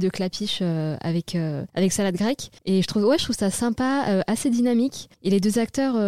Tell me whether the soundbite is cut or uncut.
cut